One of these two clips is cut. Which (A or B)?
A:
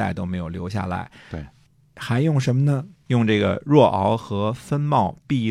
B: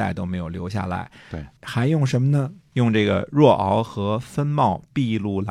B